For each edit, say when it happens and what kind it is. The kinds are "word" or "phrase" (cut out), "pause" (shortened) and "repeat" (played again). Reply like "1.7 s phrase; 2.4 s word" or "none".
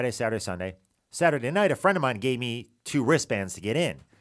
none